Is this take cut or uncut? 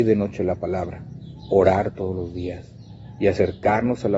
uncut